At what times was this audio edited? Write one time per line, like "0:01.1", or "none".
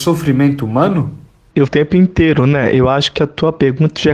0:01.7